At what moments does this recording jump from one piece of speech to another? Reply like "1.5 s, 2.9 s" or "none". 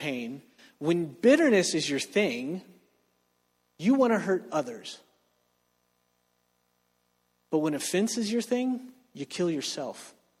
none